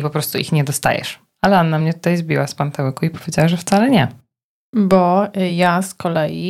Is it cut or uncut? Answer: uncut